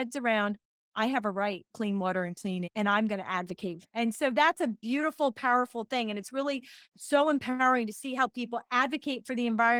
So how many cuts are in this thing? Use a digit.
4